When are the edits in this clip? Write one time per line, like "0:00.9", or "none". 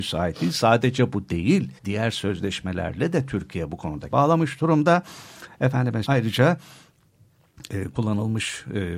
0:01.8
0:04.1
0:06.1